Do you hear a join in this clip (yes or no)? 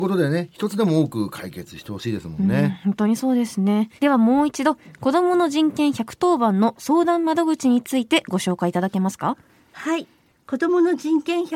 yes